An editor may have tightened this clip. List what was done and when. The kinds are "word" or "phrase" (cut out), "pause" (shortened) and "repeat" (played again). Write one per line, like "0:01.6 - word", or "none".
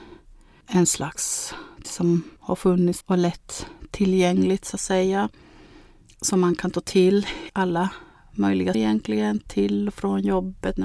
0:01.8 - phrase
0:02.4 - pause
0:03.0 - word
0:07.5 - word
0:08.7 - word

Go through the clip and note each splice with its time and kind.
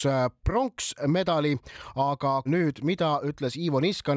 0:02.5 - word

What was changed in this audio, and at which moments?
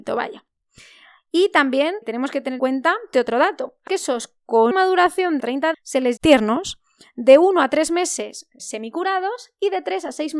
0:02.0 - word
0:02.6 - word
0:03.1 - word
0:03.9 - word
0:04.7 - word
0:05.4 - word
0:05.7 - word
0:06.2 - word
0:08.6 - word

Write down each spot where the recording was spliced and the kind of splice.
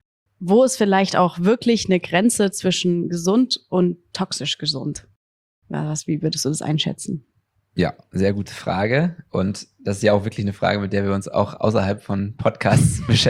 none

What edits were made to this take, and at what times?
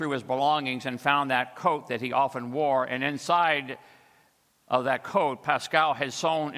none

